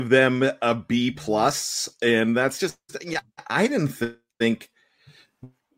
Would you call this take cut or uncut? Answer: uncut